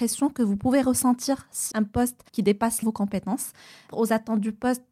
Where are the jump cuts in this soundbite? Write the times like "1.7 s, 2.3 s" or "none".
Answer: 1.7 s, 2.3 s, 2.8 s, 3.9 s